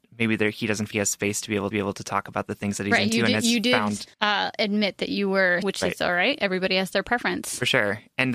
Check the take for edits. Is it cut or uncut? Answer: cut